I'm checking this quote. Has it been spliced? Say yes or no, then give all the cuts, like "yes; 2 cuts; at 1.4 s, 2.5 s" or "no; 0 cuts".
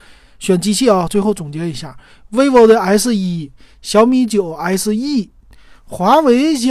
no; 0 cuts